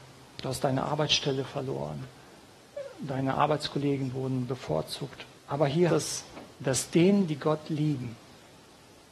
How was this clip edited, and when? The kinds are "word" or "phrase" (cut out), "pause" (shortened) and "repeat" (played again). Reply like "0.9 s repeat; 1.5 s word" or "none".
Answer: 5.4 s pause; 5.9 s word; 6.5 s pause